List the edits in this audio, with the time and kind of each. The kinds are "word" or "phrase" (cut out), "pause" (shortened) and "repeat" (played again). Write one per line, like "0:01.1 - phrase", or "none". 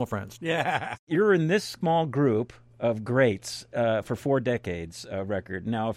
0:01.0 - word